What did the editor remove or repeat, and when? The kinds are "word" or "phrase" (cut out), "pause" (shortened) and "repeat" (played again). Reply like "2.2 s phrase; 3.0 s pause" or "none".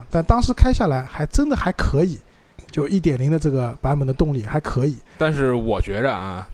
2.7 s pause; 5.1 s pause